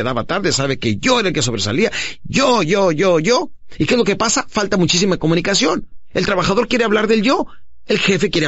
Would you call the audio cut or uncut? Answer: cut